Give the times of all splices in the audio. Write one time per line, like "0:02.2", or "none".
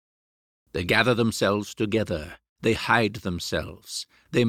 none

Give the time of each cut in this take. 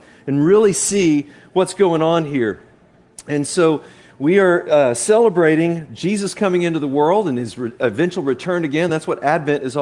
none

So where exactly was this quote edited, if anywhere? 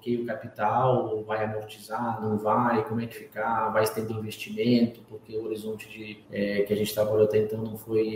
0:03.1
0:04.1
0:06.2

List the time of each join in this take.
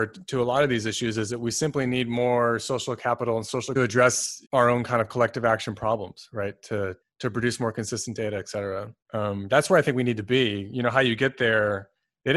0:03.8
0:04.4
0:07.0
0:09.0

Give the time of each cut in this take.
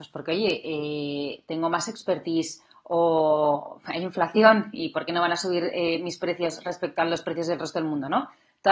none

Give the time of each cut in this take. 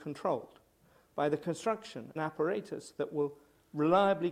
0:02.2

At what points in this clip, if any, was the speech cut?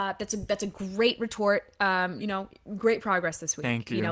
0:02.2

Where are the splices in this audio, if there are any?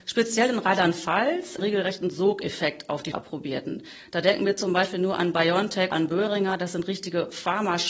0:01.6
0:03.1
0:05.9

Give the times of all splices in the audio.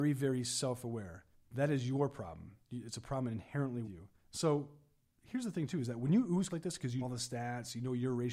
0:01.3
0:02.6
0:03.8
0:04.2
0:06.5
0:07.0

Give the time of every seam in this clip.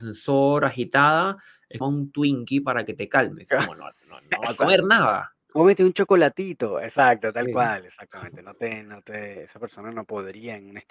0:01.8

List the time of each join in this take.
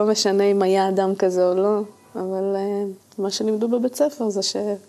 0:03.0

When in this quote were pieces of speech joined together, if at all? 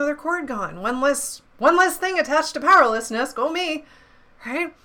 0:01.5

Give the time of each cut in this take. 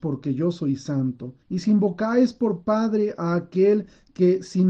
0:01.4

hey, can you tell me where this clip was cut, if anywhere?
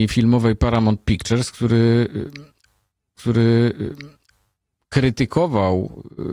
0:03.2

